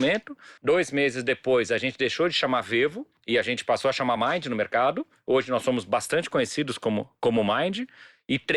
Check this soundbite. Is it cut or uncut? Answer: uncut